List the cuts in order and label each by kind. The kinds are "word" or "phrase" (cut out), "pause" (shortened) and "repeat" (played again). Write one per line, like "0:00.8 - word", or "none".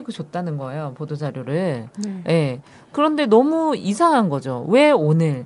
none